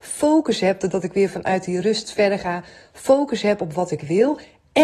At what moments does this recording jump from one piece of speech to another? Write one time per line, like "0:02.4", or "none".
none